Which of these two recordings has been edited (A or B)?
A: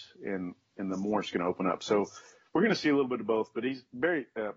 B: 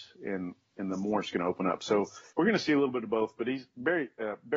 B